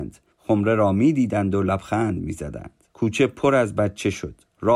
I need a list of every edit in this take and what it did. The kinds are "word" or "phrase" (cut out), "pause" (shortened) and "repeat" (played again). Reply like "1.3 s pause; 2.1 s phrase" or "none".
2.9 s pause